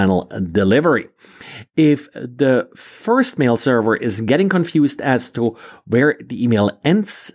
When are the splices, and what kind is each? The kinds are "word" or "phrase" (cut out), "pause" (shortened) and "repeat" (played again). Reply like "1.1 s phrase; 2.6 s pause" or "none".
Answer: none